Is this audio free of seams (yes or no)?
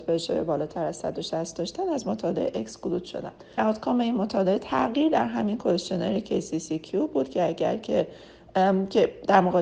no